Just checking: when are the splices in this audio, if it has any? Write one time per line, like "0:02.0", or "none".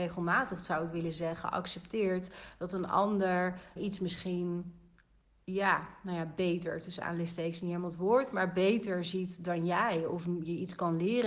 0:03.8